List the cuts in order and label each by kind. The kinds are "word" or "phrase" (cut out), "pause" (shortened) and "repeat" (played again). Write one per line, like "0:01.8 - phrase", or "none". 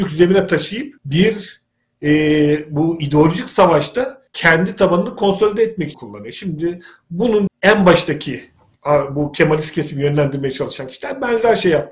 0:01.0 - pause
0:04.3 - pause
0:05.9 - word
0:07.5 - phrase